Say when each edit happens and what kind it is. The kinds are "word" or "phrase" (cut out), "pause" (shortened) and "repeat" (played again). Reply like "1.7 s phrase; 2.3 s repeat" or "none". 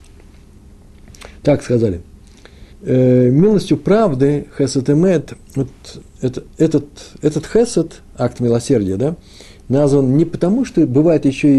2.7 s pause; 5.4 s pause